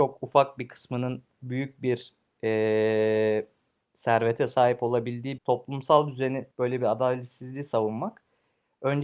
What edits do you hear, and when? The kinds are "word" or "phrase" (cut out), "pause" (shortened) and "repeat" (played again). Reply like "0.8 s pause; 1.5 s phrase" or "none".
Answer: 1.4 s word; 5.4 s word; 6.5 s word